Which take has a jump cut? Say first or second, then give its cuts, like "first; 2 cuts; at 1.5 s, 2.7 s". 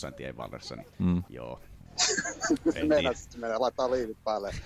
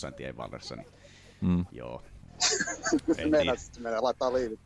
first; 1 cut; at 0.9 s